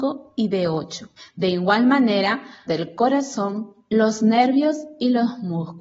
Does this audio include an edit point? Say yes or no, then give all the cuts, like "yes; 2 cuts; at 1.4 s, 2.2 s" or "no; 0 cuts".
yes; 2 cuts; at 1.2 s, 2.7 s